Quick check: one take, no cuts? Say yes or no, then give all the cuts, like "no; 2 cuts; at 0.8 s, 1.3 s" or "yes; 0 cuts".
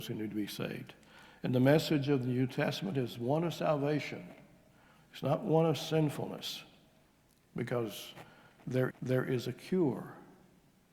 no; 1 cut; at 8.9 s